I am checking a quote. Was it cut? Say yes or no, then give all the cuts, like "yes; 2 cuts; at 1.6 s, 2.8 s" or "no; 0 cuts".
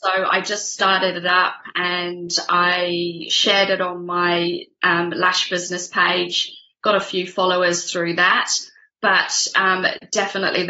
no; 0 cuts